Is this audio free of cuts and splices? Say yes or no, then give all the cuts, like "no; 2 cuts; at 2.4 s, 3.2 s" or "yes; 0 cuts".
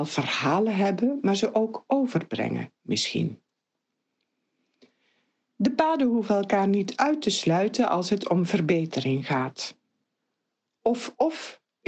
yes; 0 cuts